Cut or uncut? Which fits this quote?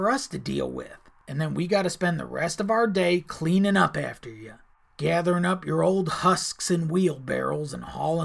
uncut